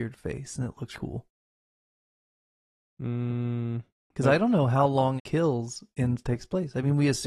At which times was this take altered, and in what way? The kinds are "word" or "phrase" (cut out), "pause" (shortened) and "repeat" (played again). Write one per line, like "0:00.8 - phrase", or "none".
0:00.9 - word
0:05.2 - word